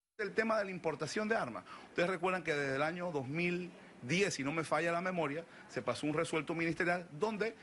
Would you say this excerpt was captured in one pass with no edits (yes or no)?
yes